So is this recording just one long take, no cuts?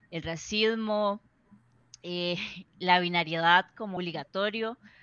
no; 1 cut; at 4.0 s

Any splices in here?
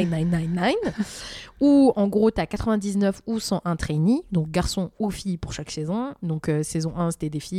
no; 0 cuts

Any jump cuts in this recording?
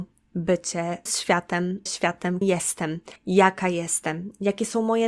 yes; 4 cuts; at 1.1 s, 1.9 s, 2.4 s, 3.2 s

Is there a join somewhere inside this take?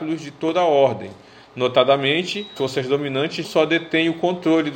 yes; 2 cuts; at 2.6 s, 3.4 s

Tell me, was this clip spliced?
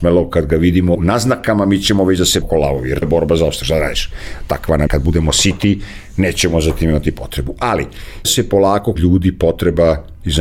yes; 6 cuts; at 0.9 s, 2.4 s, 3.0 s, 4.9 s, 8.2 s, 8.9 s

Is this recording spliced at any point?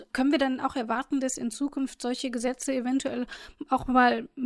no; 0 cuts

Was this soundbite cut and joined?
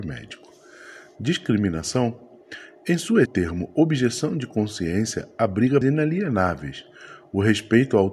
yes; 2 cuts; at 3.3 s, 5.8 s

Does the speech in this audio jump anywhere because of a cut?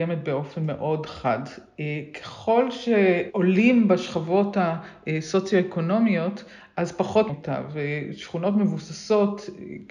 yes; 1 cut; at 7.3 s

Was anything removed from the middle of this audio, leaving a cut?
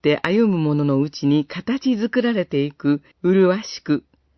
yes; 1 cut; at 3.1 s

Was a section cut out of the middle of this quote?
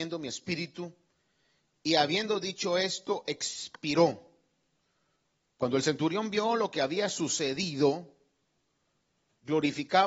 no; 0 cuts

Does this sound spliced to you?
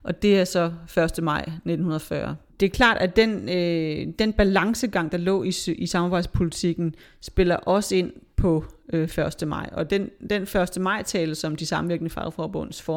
no; 0 cuts

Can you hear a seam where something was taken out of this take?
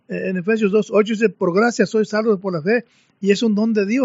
no; 0 cuts

